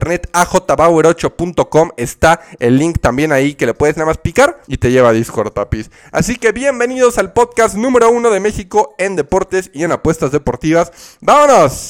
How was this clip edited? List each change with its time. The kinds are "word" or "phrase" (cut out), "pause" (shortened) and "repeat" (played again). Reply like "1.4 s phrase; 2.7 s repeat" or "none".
4.6 s pause